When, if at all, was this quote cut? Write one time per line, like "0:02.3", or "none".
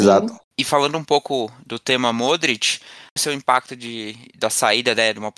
0:03.2